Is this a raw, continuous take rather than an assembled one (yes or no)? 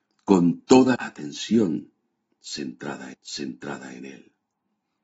no